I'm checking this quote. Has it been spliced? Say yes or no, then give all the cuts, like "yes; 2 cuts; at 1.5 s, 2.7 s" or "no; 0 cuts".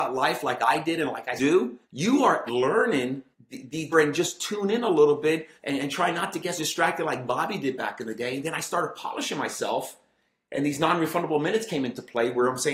yes; 8 cuts; at 1.4 s, 1.8 s, 2.5 s, 3.3 s, 3.9 s, 5.6 s, 6.6 s, 10.3 s